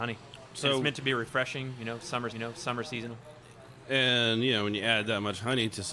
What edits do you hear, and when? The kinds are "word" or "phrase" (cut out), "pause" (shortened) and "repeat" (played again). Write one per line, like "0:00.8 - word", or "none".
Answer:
0:02.3 - repeat